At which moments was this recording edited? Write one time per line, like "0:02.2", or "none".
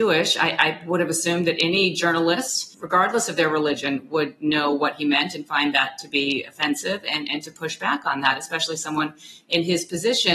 0:02.7